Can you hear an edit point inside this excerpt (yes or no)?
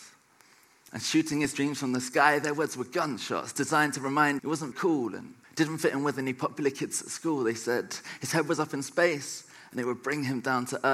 yes